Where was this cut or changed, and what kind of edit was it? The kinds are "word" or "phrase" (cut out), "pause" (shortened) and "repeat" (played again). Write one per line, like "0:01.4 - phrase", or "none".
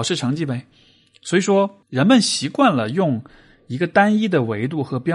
0:01.8 - pause